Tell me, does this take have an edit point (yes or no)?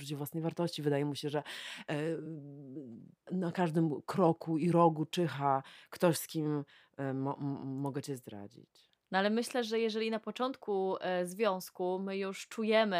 yes